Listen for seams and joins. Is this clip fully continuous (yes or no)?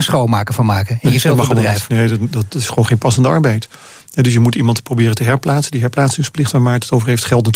yes